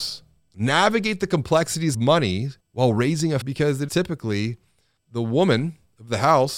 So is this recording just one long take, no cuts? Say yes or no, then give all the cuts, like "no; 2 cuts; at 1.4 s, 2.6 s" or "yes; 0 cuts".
no; 5 cuts; at 1.9 s, 2.6 s, 3.4 s, 3.9 s, 5.0 s